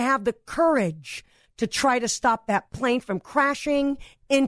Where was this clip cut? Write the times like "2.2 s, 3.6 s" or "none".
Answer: none